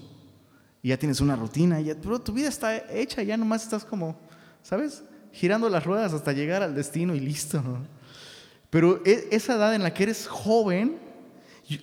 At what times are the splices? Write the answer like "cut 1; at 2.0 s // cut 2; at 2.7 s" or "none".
none